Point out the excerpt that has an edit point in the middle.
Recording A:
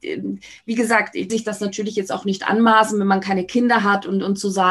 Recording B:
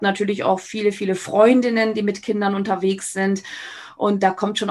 A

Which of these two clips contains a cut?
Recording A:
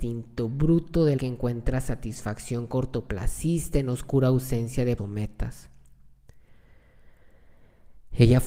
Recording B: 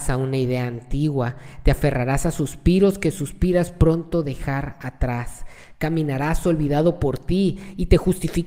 A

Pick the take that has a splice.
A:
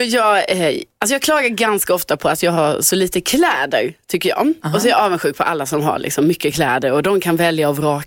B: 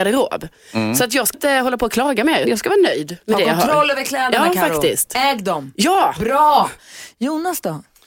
B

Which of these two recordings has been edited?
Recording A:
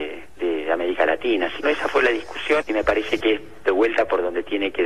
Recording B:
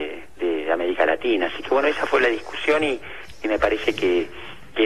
A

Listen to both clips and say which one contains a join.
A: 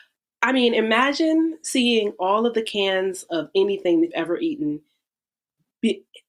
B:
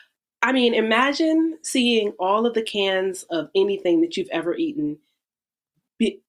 A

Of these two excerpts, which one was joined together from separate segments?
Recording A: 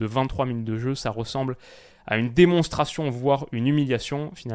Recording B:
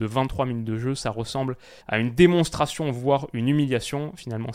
B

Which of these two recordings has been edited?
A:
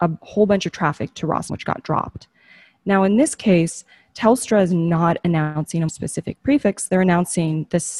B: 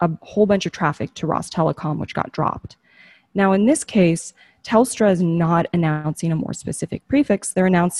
A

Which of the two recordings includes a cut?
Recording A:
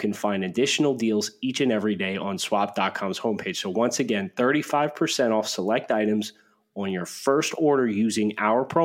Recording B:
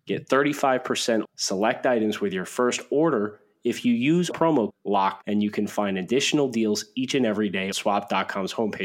B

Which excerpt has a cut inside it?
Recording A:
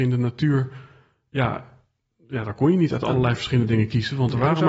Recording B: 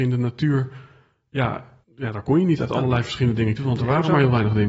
B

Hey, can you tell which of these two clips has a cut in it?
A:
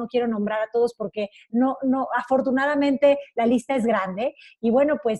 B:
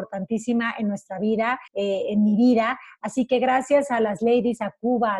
B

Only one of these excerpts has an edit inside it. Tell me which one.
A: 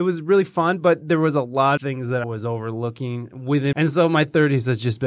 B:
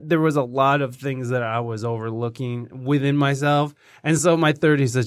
A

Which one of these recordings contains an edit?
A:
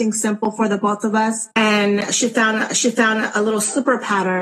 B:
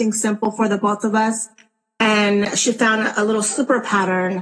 A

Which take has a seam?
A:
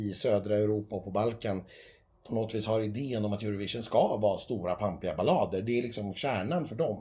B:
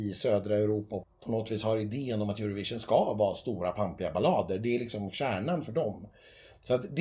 B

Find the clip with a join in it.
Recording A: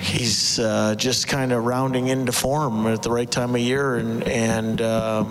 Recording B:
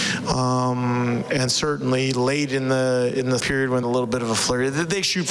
B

